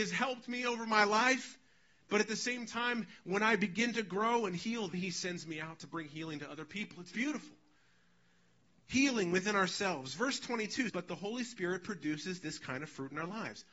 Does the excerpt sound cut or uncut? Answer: cut